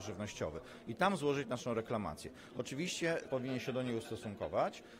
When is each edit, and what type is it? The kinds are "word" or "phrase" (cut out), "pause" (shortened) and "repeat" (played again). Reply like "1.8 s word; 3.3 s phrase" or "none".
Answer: 3.2 s word